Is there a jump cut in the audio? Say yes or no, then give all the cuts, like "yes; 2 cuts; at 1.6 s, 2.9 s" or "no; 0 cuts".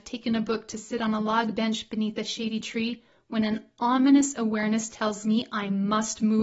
no; 0 cuts